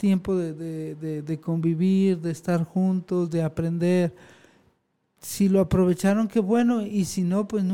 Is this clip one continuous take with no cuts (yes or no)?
yes